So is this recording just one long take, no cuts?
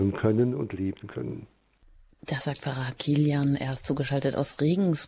yes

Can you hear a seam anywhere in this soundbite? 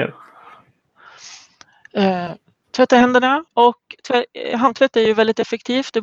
yes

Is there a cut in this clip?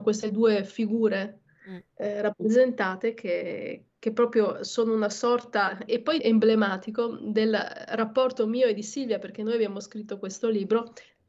yes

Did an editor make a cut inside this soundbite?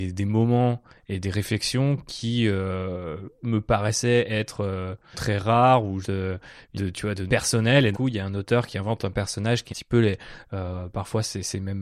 yes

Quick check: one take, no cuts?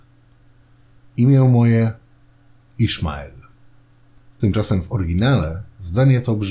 yes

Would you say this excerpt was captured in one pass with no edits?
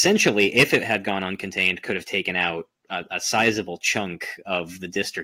yes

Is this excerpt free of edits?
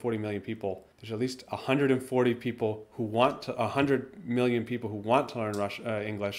no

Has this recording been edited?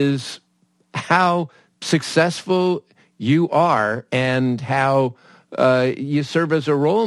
no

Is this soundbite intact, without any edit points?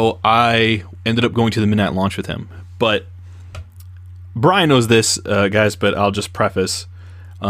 yes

